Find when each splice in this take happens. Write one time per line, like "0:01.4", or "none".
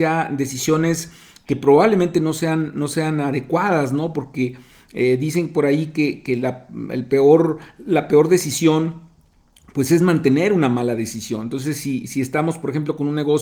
none